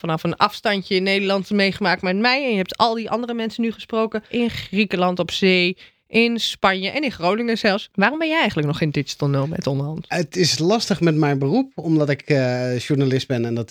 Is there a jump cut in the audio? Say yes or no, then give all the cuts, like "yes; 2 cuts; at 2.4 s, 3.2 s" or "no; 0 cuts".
no; 0 cuts